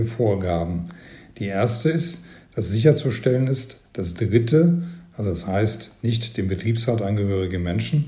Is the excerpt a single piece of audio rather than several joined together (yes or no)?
yes